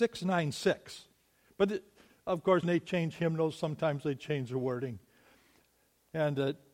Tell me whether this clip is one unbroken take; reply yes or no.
no